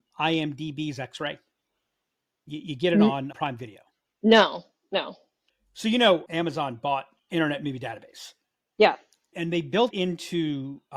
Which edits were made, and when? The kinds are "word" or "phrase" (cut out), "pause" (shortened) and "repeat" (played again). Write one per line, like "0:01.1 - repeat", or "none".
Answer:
0:03.3 - word
0:06.3 - word
0:07.2 - word
0:09.3 - word
0:09.9 - word